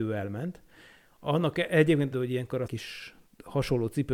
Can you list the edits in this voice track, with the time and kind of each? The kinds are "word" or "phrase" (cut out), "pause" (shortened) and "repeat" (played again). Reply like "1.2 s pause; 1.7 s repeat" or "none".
2.1 s word; 2.7 s word